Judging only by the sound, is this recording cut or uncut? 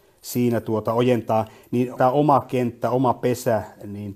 cut